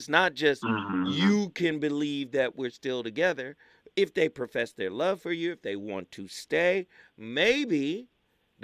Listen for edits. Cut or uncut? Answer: uncut